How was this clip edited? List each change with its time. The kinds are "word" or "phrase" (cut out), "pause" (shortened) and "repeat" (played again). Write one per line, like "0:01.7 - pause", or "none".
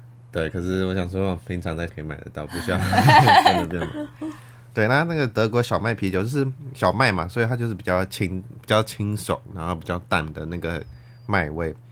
0:01.9 - word